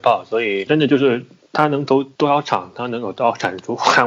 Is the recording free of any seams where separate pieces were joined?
yes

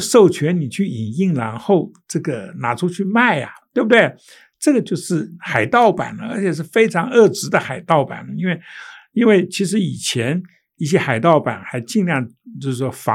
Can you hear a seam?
no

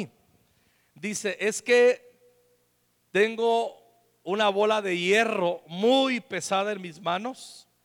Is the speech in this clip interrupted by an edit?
no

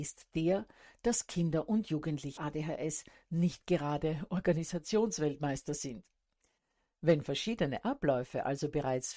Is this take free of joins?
no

